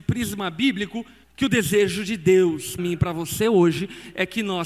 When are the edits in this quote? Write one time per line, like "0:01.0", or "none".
0:01.2
0:02.8